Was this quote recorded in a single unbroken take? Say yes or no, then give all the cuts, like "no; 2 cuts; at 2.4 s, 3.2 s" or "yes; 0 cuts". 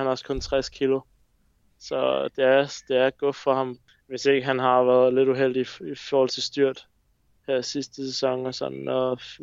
yes; 0 cuts